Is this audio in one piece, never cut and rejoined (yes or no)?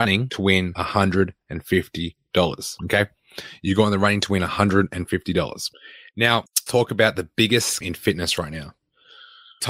no